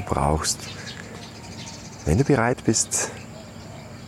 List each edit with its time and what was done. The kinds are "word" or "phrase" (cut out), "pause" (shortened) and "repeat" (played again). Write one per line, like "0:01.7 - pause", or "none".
none